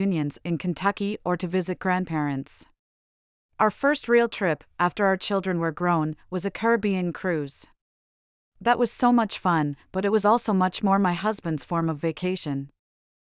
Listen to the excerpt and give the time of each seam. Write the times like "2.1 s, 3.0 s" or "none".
none